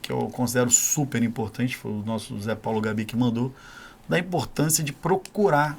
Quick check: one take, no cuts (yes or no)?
yes